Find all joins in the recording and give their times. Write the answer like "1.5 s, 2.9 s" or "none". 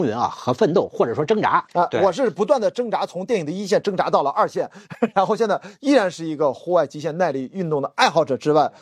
1.7 s